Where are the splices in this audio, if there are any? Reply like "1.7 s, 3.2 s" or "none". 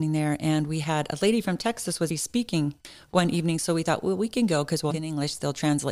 2.1 s, 4.9 s